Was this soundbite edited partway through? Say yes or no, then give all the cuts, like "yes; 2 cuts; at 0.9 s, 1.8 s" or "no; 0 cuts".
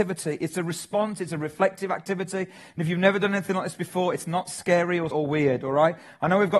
yes; 1 cut; at 5.1 s